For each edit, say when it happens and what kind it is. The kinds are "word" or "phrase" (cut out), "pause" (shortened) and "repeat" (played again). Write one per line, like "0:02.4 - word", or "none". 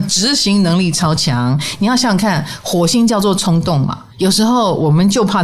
0:04.1 - pause